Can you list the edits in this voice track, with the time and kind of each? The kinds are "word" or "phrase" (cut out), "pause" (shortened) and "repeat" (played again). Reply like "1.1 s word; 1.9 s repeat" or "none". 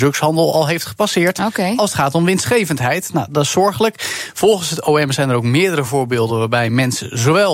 none